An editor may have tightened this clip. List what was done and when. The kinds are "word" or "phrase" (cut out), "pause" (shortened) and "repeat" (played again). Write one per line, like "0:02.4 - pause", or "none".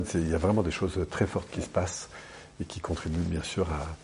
none